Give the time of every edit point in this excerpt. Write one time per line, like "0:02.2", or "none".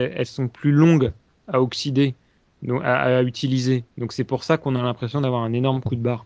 none

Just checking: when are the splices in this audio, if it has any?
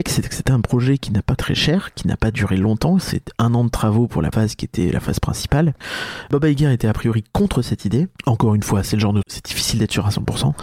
0:01.4
0:04.3
0:09.2

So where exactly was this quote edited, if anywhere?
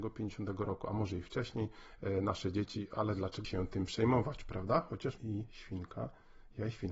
0:03.4
0:05.2

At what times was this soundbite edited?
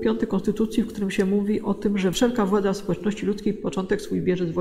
0:02.1

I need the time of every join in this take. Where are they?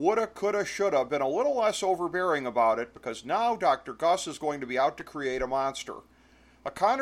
none

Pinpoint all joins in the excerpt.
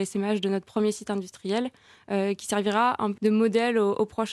0:03.2

